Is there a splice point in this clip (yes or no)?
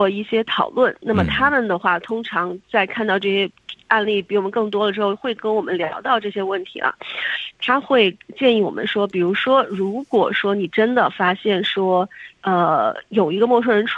yes